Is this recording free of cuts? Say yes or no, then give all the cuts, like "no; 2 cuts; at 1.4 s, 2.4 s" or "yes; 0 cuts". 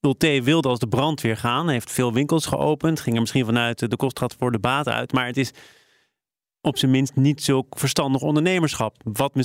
yes; 0 cuts